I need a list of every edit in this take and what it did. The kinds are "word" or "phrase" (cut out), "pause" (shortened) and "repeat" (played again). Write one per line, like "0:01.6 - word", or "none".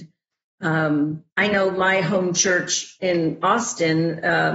0:01.3 - pause